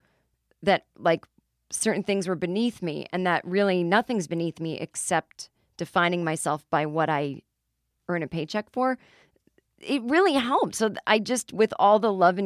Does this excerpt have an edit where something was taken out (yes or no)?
no